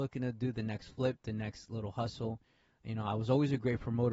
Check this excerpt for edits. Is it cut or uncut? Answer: uncut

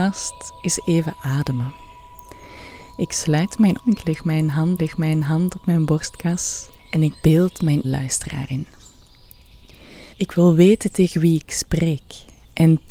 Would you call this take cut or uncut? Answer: cut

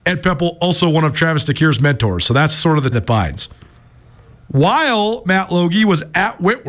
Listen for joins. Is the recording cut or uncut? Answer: cut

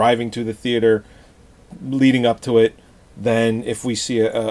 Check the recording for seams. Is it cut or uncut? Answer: uncut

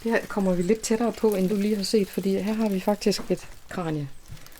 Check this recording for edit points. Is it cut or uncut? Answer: cut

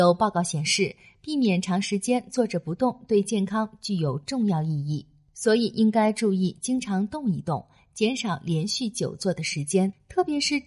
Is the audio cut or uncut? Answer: uncut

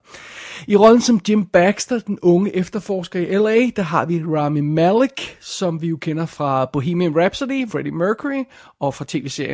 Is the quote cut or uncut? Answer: cut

